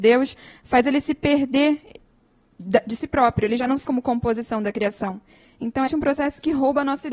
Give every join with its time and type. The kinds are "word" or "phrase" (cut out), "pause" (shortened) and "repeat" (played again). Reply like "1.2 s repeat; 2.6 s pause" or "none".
3.8 s word; 5.9 s word